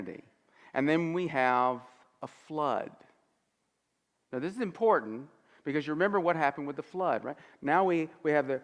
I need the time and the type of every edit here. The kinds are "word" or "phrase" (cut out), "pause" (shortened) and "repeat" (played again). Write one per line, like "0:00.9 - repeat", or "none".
none

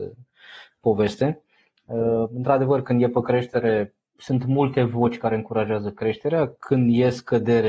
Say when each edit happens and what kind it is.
none

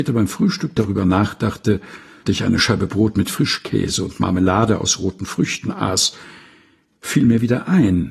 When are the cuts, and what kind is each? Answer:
0:02.3 - word

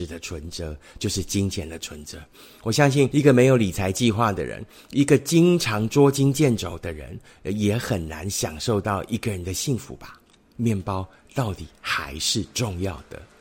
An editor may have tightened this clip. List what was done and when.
none

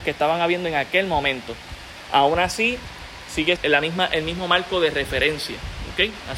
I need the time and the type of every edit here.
0:03.6 - word

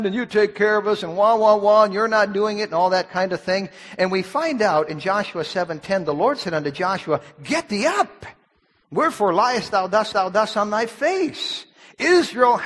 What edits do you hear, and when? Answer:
0:10.1 - repeat

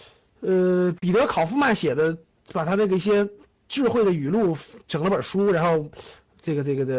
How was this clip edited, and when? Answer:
none

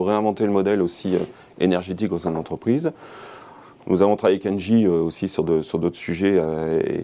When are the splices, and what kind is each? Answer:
none

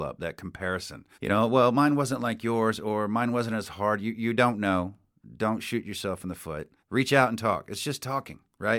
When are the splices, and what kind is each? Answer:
0:01.1 - pause
0:05.1 - pause
0:06.8 - pause

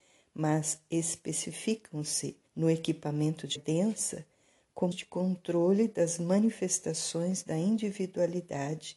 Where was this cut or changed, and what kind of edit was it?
0:02.5 - pause
0:03.6 - word
0:04.9 - word

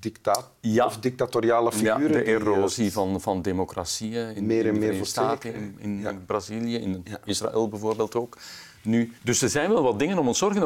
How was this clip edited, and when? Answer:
0:09.2 - pause

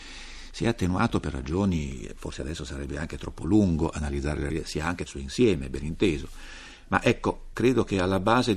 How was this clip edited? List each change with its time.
0:04.5 - phrase
0:05.1 - phrase
0:07.5 - word

